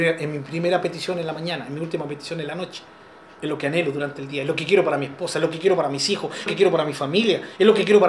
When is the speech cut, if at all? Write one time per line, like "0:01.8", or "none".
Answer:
0:06.5